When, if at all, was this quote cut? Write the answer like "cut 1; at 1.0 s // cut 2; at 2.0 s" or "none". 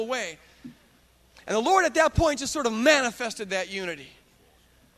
none